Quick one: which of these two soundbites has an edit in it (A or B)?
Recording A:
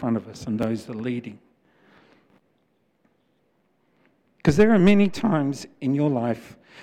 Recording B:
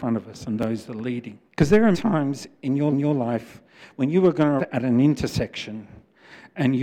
B